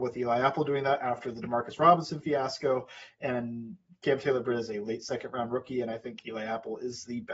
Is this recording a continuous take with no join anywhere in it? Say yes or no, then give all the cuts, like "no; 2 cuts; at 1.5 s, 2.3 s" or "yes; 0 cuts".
yes; 0 cuts